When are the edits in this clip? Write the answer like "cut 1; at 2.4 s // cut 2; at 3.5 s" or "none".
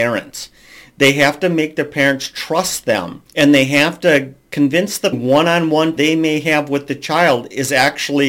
cut 1; at 3.3 s // cut 2; at 5.1 s // cut 3; at 6.0 s